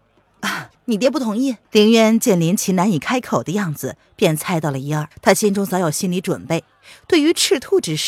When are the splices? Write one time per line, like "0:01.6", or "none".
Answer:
0:01.6
0:05.1

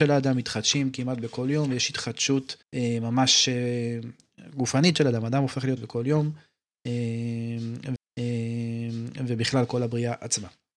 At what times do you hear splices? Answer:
0:02.6
0:05.8
0:08.0

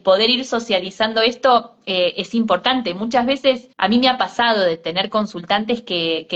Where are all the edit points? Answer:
0:03.7

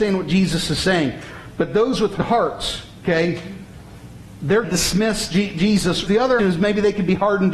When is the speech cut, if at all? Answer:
0:02.2
0:04.6
0:06.1
0:06.4

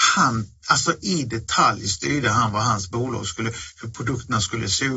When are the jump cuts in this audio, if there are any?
0:01.0

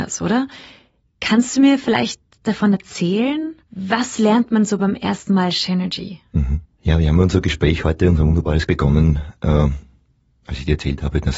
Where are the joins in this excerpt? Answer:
0:03.6
0:06.7
0:08.7

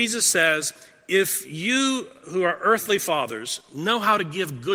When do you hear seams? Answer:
none

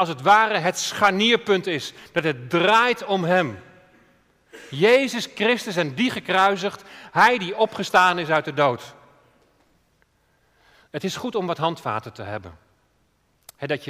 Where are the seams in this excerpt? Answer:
none

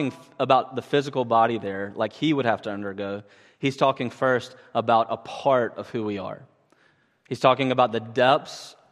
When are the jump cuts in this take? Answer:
none

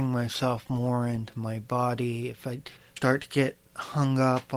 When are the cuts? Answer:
0:02.8

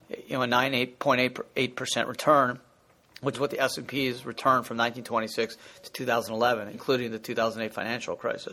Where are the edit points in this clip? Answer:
0:03.3
0:06.7

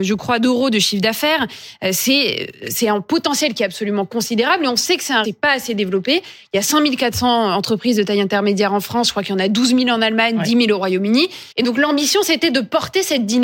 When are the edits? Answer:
0:05.2
0:11.5

